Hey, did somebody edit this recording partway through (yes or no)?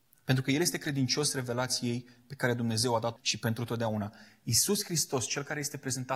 yes